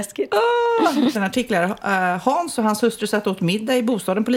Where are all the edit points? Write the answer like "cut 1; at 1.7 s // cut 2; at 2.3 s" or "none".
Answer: cut 1; at 1.1 s